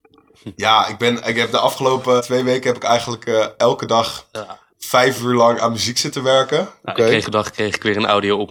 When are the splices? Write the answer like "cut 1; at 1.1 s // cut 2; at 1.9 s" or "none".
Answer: cut 1; at 2.2 s // cut 2; at 4.7 s // cut 3; at 7.2 s